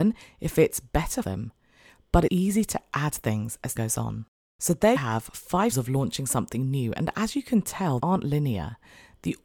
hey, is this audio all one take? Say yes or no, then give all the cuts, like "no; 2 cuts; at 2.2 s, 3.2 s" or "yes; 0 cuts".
no; 6 cuts; at 1.2 s, 2.3 s, 3.8 s, 5.0 s, 5.7 s, 8.0 s